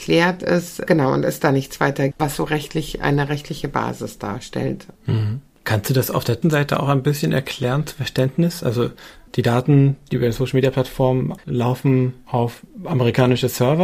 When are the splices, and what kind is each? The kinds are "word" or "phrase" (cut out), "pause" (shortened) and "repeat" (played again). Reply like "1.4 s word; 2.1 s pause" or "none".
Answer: 2.1 s word; 5.0 s pause; 6.4 s word; 11.4 s word